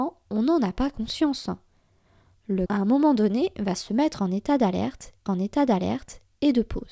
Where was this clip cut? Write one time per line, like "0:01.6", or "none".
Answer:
0:02.7
0:05.3